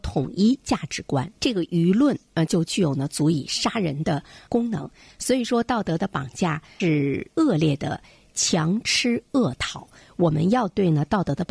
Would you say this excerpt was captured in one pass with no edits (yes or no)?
yes